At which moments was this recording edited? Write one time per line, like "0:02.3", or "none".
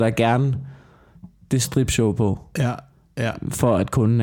0:01.6